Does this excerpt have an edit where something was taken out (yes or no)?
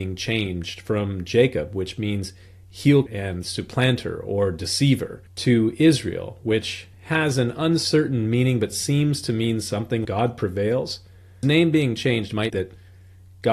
yes